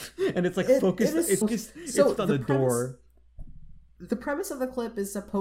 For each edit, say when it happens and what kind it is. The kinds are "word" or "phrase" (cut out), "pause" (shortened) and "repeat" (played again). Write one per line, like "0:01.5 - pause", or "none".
0:01.4 - word
0:02.2 - word